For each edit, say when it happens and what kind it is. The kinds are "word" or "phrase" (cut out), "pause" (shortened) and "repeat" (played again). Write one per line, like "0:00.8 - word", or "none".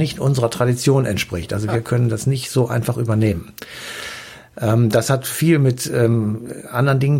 none